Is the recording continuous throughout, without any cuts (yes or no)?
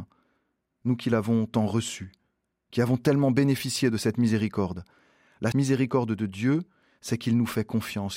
no